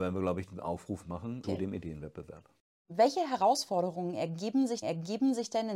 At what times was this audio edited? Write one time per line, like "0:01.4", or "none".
0:04.8

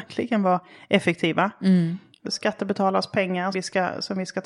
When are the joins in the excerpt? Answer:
0:02.2
0:03.5

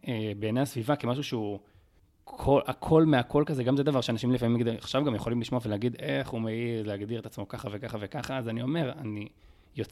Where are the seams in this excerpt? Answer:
0:02.0

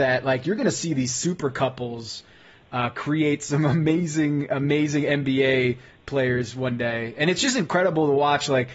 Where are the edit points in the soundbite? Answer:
none

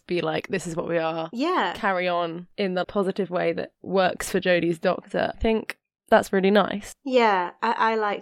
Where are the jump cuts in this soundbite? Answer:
0:02.8
0:03.7
0:05.3

